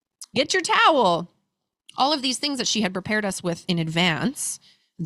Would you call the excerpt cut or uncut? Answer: uncut